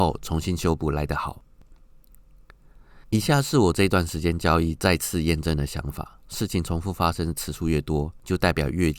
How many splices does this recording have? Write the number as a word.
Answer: one